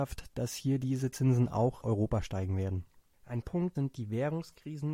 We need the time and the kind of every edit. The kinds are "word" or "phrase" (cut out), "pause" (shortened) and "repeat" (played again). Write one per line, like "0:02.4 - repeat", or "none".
0:01.8 - word
0:03.4 - word
0:03.7 - word